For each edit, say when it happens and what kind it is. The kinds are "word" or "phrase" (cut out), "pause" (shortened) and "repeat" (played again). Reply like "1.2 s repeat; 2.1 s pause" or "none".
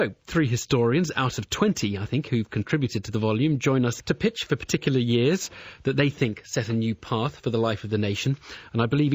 4.0 s word